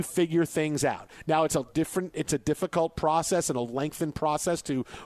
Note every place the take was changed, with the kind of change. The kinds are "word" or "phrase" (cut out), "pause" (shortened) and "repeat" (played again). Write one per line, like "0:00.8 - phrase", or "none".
none